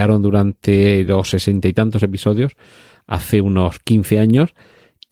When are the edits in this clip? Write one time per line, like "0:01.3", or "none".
none